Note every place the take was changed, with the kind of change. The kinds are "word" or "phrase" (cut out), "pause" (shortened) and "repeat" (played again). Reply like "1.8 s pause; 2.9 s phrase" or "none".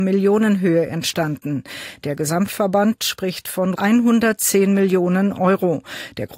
3.0 s phrase; 3.7 s word